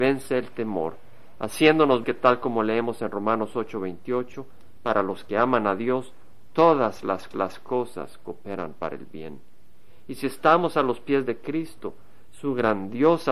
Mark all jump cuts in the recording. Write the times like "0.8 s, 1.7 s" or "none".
2.0 s, 7.3 s